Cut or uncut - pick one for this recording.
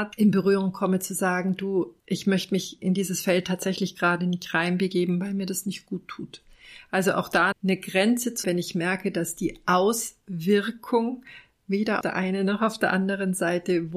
cut